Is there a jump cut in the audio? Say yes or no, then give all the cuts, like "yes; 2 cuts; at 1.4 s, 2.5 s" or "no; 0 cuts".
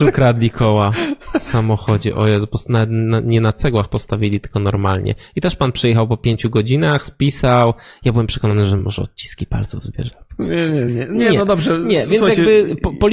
no; 0 cuts